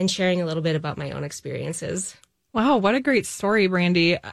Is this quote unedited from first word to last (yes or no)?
yes